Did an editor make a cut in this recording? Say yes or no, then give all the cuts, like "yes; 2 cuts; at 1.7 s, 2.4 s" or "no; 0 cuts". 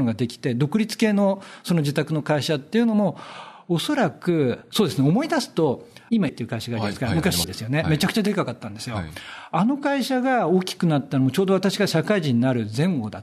yes; 2 cuts; at 6.3 s, 7.4 s